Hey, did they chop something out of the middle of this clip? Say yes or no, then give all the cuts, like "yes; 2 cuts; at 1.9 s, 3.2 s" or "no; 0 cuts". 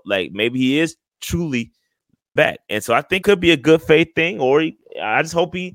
yes; 2 cuts; at 2.4 s, 3.2 s